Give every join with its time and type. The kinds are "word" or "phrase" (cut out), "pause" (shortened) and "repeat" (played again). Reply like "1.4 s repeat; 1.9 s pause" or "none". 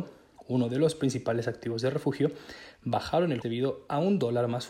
3.4 s word